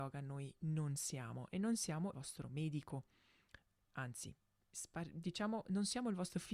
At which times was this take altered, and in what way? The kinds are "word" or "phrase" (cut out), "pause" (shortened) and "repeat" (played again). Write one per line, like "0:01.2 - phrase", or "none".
0:02.1 - word
0:03.8 - pause